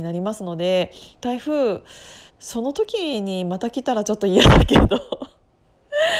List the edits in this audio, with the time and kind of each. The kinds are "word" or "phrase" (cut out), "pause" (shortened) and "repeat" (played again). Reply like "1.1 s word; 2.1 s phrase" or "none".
2.3 s pause